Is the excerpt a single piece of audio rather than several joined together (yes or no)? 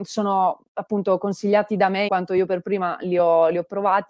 no